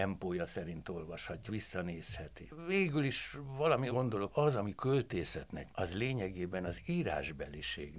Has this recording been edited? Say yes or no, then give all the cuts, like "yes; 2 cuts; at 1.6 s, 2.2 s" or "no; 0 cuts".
yes; 5 cuts; at 1.5 s, 3.9 s, 4.3 s, 4.8 s, 5.7 s